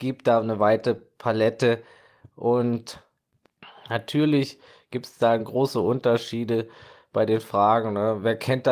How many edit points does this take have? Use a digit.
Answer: 0